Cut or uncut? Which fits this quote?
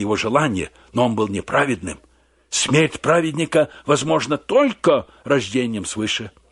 uncut